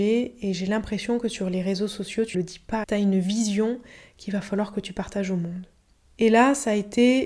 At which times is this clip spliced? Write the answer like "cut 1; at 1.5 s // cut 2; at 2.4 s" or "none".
cut 1; at 2.3 s // cut 2; at 2.8 s